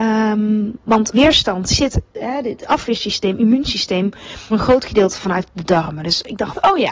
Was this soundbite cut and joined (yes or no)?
yes